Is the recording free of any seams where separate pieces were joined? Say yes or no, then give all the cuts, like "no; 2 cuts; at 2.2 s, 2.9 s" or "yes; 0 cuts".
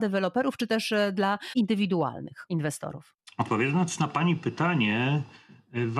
yes; 0 cuts